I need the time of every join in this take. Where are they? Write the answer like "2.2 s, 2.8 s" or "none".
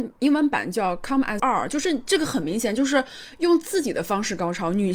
1.4 s